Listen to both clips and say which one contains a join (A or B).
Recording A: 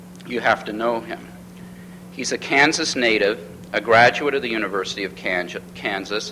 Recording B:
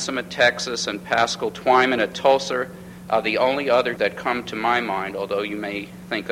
B